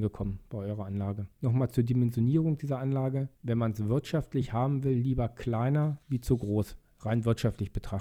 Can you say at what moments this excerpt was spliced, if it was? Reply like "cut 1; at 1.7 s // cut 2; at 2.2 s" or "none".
cut 1; at 1.3 s // cut 2; at 6.0 s